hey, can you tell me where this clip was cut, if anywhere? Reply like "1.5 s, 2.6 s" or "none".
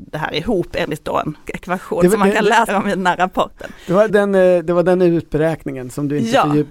1.5 s, 2.7 s, 4.1 s

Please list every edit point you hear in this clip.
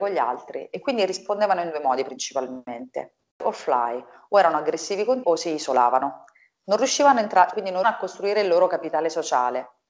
3.3 s, 5.2 s, 7.5 s, 7.8 s

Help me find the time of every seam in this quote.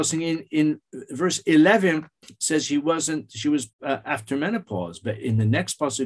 3.7 s

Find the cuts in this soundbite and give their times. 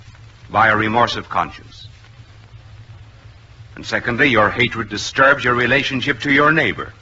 none

